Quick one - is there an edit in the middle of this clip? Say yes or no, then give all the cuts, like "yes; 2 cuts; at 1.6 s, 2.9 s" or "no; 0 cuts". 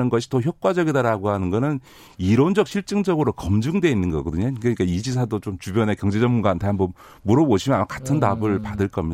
no; 0 cuts